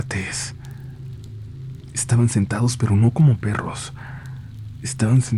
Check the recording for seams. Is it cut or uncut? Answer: uncut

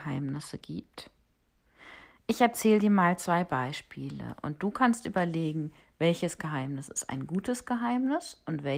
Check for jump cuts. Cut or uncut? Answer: uncut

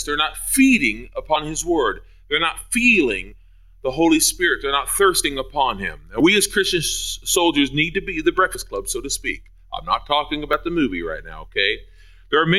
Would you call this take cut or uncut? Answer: uncut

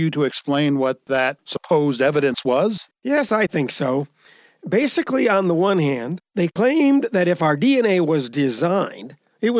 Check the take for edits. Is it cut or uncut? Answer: uncut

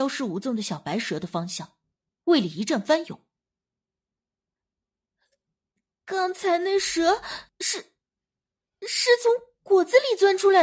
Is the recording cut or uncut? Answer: cut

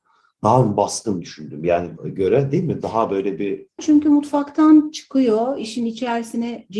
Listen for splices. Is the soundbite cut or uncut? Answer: cut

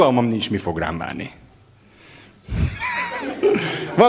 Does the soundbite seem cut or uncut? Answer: uncut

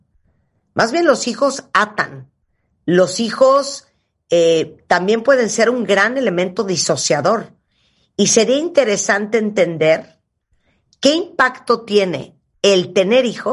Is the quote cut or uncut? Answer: uncut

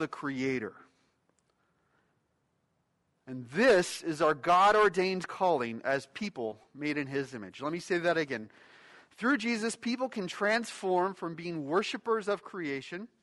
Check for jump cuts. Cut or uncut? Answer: uncut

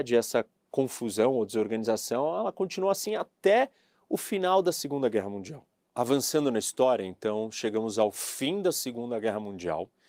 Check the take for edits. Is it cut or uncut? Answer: uncut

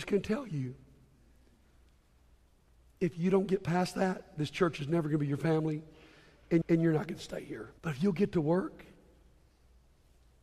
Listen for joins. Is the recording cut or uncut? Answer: cut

